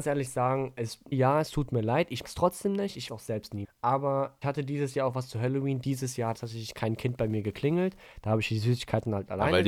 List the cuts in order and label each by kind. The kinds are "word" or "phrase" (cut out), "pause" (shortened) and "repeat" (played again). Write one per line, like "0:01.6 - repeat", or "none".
0:01.1 - word
0:02.2 - word
0:03.1 - word
0:03.6 - word
0:04.4 - word
0:06.3 - word

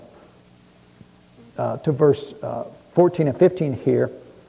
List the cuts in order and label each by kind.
none

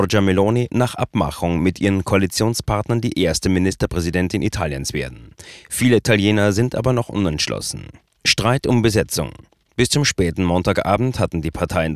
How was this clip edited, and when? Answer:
none

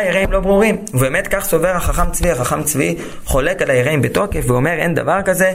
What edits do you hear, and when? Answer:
none

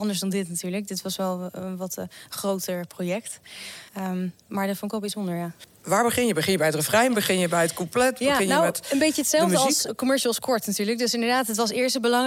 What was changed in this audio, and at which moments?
0:03.9 - pause
0:09.9 - word

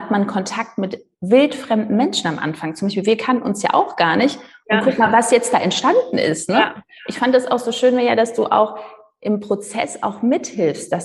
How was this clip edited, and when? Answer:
none

